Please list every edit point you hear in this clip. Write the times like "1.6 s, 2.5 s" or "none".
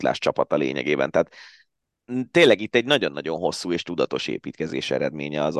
none

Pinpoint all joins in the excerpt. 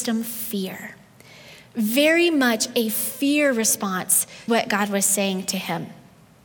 4.5 s

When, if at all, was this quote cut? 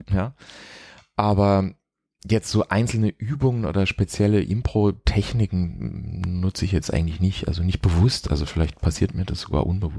none

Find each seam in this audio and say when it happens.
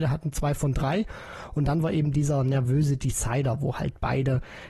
none

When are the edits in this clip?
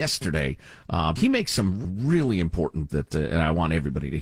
1.2 s, 1.8 s, 2.9 s

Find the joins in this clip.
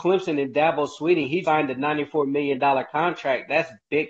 1.4 s

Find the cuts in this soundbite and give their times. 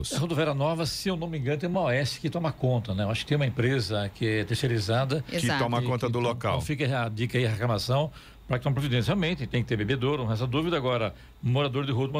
none

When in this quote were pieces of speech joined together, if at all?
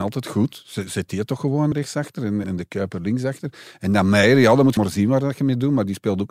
1.7 s, 2.4 s, 4.8 s

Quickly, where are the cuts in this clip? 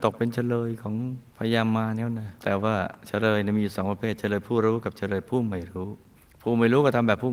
1.3 s, 2.4 s, 6.2 s

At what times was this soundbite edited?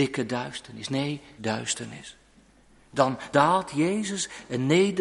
1.4 s, 3.3 s

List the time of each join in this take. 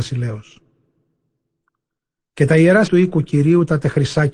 2.9 s

